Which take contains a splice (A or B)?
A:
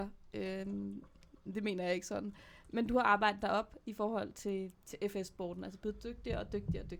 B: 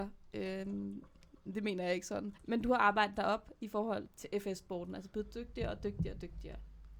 B